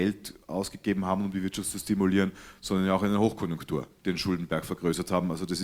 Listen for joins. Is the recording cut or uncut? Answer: cut